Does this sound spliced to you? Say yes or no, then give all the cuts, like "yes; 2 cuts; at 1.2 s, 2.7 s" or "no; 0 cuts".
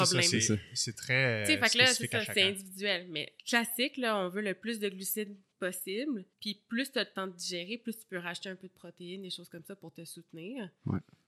yes; 2 cuts; at 3.4 s, 6.3 s